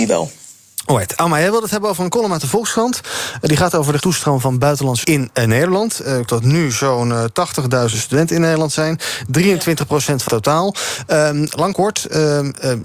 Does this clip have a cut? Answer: yes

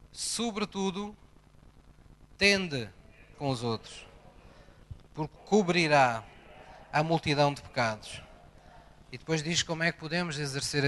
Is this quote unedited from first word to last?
no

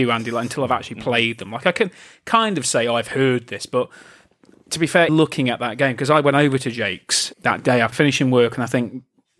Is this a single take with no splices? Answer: no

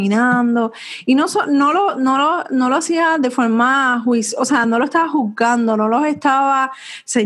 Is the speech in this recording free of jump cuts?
yes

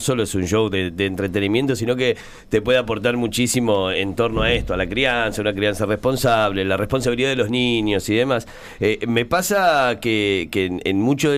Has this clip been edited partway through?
no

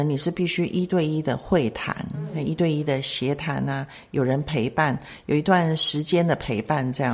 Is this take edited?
no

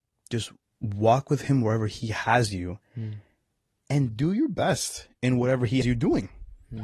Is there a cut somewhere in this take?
yes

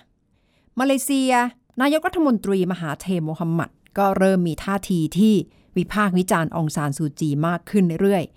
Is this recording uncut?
no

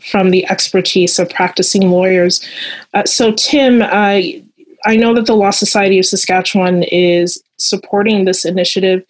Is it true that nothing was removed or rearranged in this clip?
yes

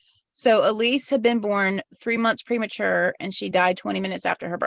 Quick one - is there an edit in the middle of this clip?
no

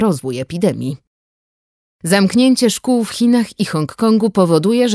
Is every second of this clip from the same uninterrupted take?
yes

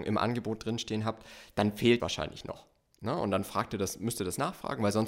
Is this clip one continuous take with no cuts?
no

